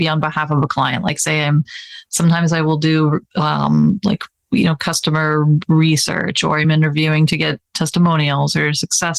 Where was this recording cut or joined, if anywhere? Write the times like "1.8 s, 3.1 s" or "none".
none